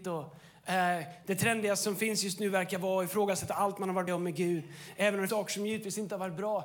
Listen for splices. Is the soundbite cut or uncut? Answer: cut